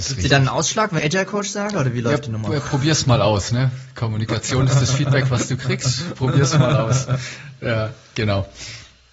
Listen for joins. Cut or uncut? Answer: cut